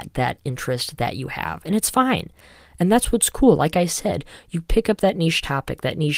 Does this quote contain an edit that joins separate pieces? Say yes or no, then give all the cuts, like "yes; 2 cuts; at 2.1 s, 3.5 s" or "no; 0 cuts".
no; 0 cuts